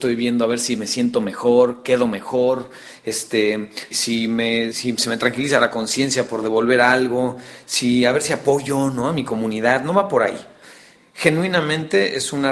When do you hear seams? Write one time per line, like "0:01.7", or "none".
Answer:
0:03.9
0:04.7